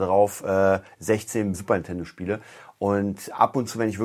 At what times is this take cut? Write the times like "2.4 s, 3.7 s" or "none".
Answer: 1.5 s